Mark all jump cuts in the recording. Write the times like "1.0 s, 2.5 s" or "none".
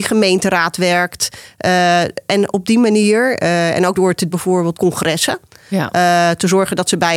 3.9 s, 4.3 s, 4.7 s